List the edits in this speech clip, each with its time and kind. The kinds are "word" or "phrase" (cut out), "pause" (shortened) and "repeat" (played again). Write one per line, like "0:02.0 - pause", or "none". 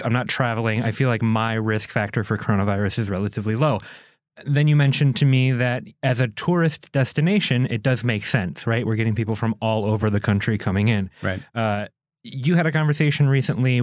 none